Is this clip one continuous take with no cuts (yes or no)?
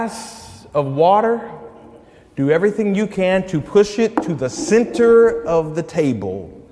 yes